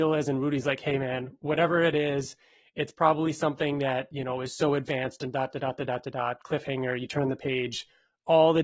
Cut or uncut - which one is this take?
uncut